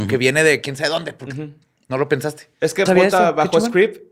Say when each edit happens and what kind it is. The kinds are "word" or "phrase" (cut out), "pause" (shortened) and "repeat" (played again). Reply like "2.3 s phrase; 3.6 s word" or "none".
2.9 s word